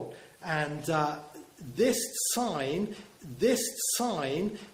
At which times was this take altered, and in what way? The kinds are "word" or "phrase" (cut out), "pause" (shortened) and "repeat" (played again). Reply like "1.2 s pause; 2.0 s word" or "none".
3.2 s repeat